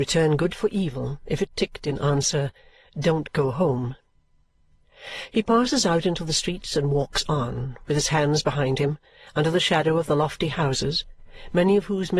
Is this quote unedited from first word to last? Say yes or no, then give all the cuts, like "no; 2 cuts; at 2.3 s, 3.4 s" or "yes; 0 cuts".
yes; 0 cuts